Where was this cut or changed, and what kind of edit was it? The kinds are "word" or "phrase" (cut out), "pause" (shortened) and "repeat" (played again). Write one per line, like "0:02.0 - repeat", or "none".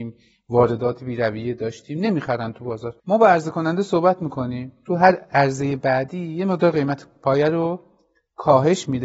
0:03.0 - pause